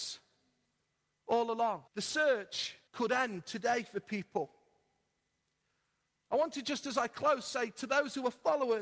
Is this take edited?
yes; 2 cuts; at 1.9 s, 2.9 s

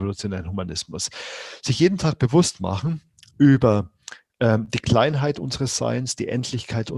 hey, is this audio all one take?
yes; 0 cuts

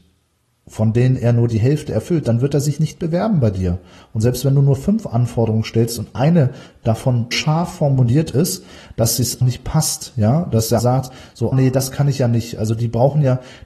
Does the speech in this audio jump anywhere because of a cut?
yes; 4 cuts; at 7.3 s, 9.4 s, 10.8 s, 11.5 s

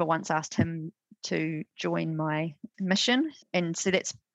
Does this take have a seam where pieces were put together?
no; 0 cuts

